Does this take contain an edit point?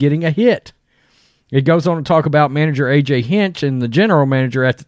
no; 0 cuts

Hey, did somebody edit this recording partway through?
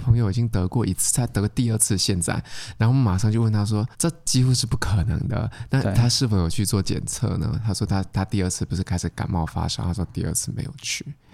yes; 1 cut; at 3.9 s

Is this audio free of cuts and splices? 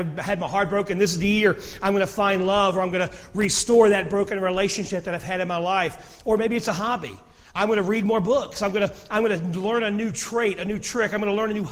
yes; 0 cuts

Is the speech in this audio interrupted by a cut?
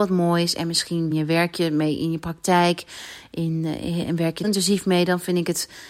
yes; 2 cuts; at 1.1 s, 4.4 s

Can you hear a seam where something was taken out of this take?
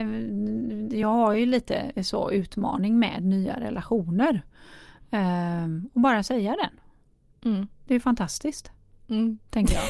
no; 0 cuts

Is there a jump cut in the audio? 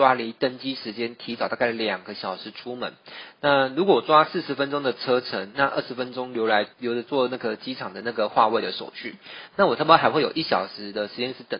yes; 1 cut; at 6.7 s

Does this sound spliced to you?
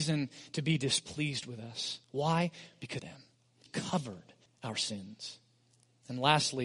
yes; 4 cuts; at 2.0 s, 3.0 s, 3.7 s, 4.5 s

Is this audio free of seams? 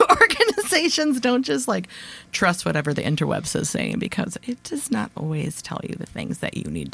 yes; 0 cuts

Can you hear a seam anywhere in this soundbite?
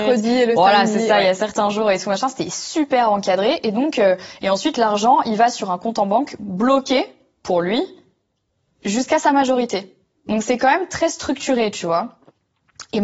no; 0 cuts

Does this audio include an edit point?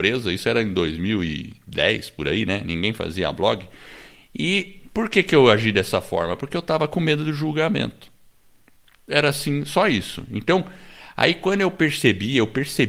no; 0 cuts

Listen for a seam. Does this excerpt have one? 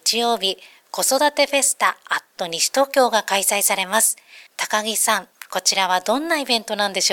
yes; 1 cut; at 4.5 s

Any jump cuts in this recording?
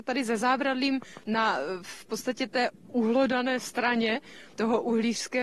no; 0 cuts

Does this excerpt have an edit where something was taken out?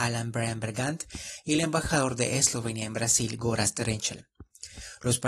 no; 0 cuts

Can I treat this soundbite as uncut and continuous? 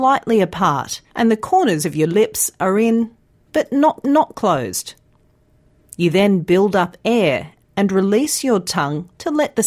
no; 2 cuts; at 1.1 s, 4.0 s

